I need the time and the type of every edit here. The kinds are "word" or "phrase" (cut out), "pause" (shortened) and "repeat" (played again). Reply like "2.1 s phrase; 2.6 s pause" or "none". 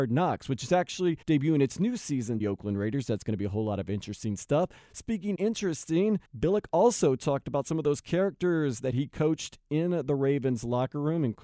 1.2 s pause; 2.4 s phrase; 5.4 s word; 6.3 s pause